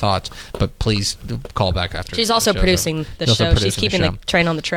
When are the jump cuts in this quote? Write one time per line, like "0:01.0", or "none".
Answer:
none